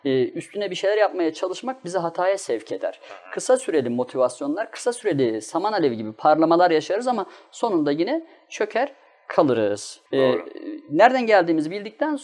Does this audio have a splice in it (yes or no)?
yes